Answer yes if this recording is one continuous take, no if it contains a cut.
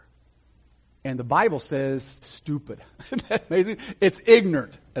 no